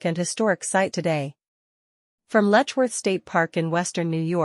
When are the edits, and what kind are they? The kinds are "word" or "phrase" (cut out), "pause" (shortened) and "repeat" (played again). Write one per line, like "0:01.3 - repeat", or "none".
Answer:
0:00.9 - phrase